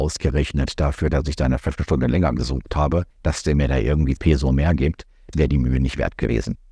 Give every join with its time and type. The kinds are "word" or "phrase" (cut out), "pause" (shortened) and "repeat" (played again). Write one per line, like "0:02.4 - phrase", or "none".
0:03.1 - pause
0:04.2 - word
0:05.3 - word

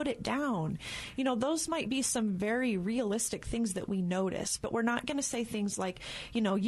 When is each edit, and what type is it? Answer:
none

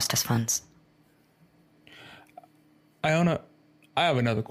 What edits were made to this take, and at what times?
none

